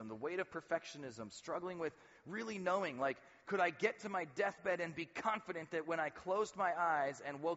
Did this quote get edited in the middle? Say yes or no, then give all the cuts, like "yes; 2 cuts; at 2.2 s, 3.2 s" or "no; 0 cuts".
no; 0 cuts